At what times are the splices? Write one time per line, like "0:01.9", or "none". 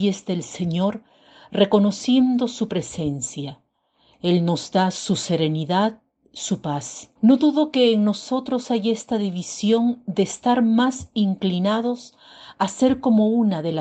0:07.2